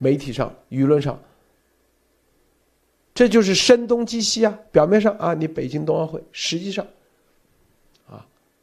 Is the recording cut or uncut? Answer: uncut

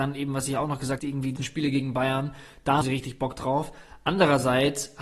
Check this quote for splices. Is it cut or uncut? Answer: cut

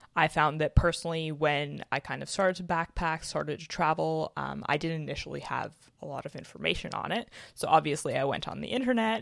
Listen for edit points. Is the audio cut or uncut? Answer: uncut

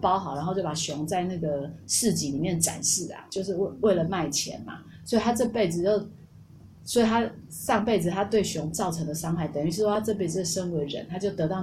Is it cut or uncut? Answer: uncut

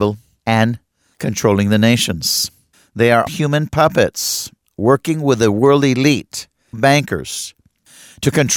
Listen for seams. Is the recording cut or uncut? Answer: cut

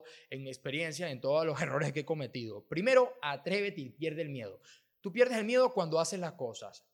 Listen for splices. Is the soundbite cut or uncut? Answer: uncut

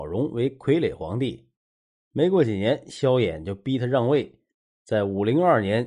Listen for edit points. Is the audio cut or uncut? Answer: uncut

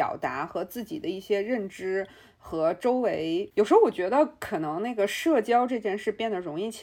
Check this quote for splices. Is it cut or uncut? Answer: uncut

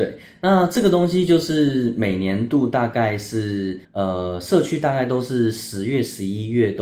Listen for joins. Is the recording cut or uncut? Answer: cut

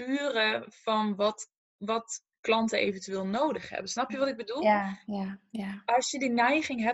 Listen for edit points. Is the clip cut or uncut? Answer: uncut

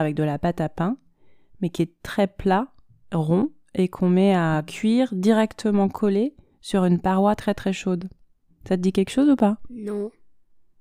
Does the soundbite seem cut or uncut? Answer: uncut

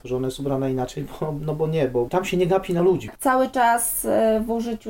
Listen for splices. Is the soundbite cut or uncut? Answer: uncut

